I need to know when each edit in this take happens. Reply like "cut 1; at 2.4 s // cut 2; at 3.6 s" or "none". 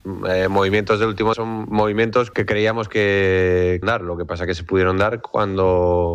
cut 1; at 1.3 s // cut 2; at 2.3 s // cut 3; at 3.8 s